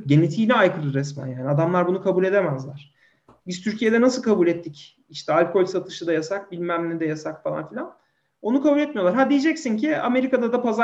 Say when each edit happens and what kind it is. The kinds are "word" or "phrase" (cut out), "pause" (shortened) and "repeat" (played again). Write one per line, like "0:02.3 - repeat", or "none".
none